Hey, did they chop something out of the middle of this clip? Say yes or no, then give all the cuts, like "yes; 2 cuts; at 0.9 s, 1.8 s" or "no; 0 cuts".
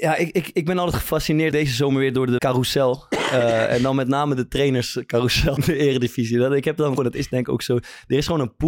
yes; 4 cuts; at 1.5 s, 2.4 s, 5.6 s, 7.0 s